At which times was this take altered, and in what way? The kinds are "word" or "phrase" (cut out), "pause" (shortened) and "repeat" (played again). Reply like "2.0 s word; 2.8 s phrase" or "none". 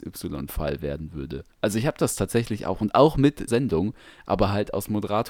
1.5 s pause; 3.5 s word